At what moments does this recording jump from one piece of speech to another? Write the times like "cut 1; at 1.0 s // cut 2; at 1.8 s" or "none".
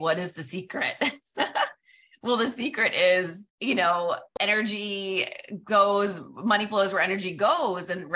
cut 1; at 3.5 s // cut 2; at 4.3 s

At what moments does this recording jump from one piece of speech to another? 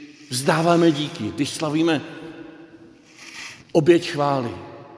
none

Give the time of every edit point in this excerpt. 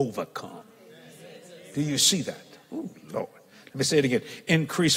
none

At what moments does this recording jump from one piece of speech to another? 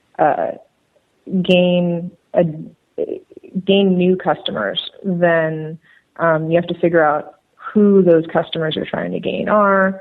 cut 1; at 2.2 s

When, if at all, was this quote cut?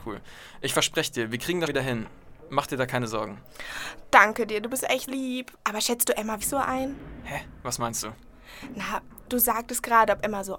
cut 1; at 1.7 s // cut 2; at 5.1 s // cut 3; at 5.5 s // cut 4; at 6.4 s

